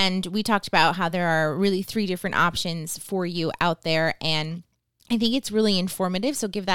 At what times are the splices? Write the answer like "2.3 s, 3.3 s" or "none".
none